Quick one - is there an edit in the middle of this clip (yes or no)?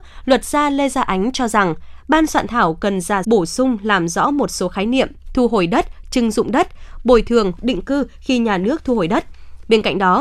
yes